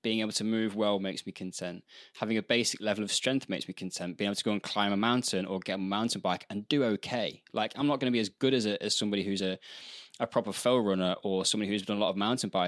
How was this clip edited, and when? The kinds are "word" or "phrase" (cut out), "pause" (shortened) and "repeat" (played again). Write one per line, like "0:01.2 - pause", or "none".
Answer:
none